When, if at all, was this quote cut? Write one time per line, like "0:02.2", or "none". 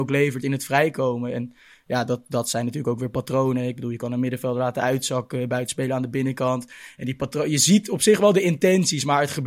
none